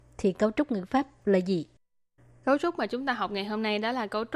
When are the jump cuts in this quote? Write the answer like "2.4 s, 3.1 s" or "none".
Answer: none